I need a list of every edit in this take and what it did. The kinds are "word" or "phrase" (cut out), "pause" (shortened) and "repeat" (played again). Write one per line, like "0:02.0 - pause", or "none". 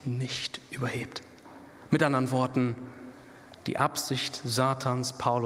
none